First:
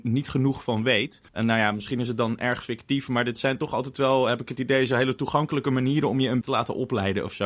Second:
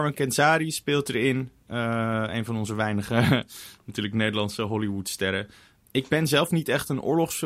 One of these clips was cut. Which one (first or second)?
first